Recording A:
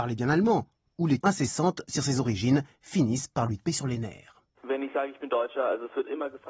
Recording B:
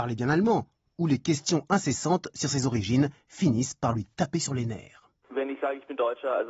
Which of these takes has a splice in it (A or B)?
A